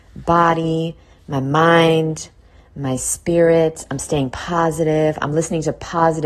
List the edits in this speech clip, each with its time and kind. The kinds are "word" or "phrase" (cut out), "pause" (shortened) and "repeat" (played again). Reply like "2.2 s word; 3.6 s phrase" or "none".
none